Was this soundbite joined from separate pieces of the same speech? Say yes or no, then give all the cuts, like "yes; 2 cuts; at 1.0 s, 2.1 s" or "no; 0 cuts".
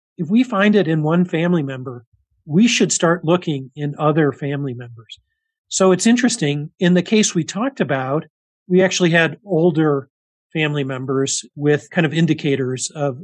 no; 0 cuts